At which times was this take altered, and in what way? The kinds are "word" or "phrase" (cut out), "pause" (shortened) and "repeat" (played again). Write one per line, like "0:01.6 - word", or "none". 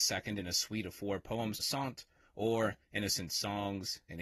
0:01.6 - phrase